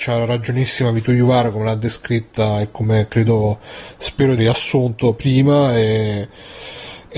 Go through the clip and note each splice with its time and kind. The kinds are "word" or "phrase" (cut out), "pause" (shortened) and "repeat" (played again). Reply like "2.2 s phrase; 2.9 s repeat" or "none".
4.4 s word